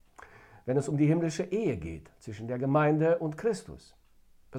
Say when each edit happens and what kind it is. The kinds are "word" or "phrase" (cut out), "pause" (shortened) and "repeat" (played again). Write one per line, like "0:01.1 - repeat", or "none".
none